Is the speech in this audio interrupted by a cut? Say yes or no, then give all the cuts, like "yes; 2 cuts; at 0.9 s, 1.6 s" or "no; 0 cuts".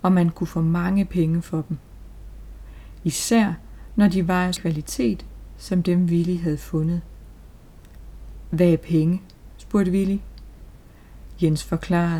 yes; 1 cut; at 4.6 s